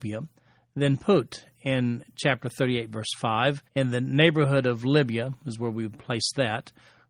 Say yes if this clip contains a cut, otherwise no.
yes